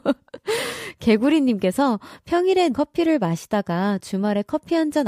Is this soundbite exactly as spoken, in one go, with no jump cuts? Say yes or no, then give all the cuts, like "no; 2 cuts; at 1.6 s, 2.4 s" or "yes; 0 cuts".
no; 1 cut; at 2.7 s